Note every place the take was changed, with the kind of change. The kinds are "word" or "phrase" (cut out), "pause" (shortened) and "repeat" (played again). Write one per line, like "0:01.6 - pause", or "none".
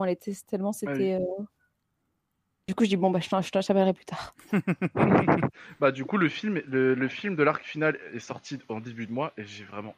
none